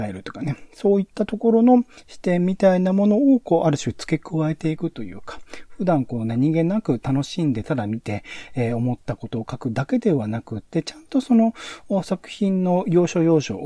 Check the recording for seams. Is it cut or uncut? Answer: uncut